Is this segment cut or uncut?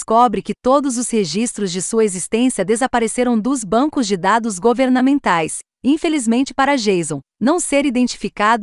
uncut